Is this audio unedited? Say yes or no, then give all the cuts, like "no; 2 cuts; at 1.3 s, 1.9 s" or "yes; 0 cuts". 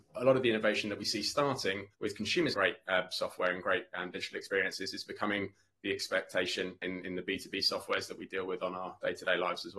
no; 3 cuts; at 1.9 s, 2.5 s, 6.8 s